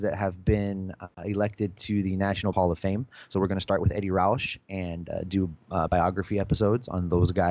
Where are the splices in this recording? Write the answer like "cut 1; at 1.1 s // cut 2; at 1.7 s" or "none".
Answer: cut 1; at 1.1 s // cut 2; at 2.5 s // cut 3; at 5.9 s